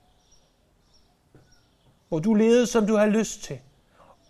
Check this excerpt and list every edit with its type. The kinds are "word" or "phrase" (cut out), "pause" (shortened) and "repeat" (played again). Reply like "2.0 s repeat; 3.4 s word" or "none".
none